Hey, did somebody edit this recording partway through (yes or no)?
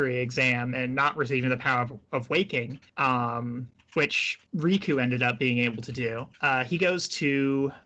yes